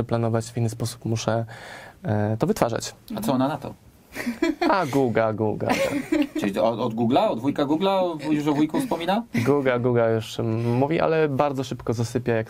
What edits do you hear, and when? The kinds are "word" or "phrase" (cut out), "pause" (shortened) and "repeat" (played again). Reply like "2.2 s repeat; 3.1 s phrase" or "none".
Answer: none